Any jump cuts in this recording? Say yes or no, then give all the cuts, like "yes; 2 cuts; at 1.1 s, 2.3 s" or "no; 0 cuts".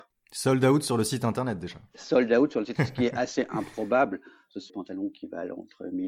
yes; 2 cuts; at 2.8 s, 4.7 s